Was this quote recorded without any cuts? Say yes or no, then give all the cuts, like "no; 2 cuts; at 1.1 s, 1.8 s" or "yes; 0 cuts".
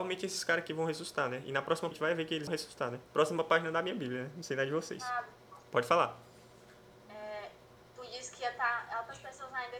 no; 3 cuts; at 1.9 s, 2.5 s, 3.1 s